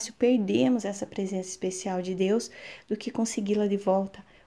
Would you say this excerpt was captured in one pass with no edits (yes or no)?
yes